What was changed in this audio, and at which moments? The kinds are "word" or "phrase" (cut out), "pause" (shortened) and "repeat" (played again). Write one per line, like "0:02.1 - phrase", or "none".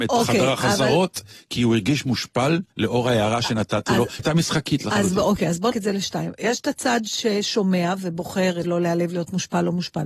0:02.7 - pause
0:04.2 - word
0:05.7 - word
0:08.6 - word